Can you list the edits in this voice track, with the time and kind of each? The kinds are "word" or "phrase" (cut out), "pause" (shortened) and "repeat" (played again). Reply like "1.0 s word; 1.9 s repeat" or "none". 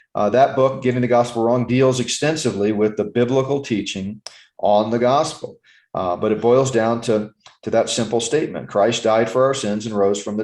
none